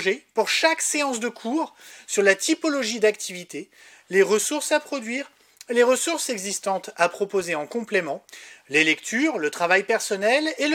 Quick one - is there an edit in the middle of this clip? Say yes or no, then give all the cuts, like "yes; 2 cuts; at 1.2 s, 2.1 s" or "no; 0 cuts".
no; 0 cuts